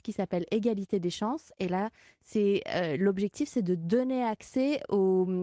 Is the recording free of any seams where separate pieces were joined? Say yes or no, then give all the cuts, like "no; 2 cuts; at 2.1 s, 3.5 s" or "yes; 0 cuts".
yes; 0 cuts